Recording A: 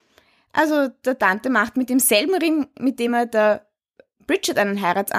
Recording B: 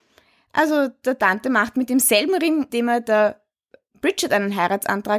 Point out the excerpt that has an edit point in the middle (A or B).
B